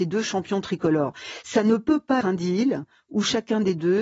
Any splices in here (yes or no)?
yes